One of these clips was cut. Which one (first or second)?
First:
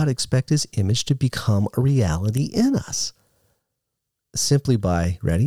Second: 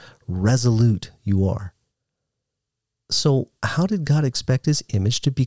second